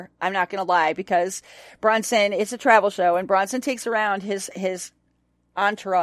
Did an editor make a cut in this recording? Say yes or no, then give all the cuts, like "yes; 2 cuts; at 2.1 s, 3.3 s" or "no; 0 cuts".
no; 0 cuts